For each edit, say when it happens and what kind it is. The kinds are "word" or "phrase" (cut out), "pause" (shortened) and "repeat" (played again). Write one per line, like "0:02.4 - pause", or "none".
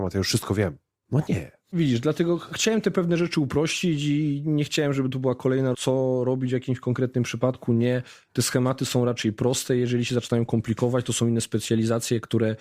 0:05.7 - phrase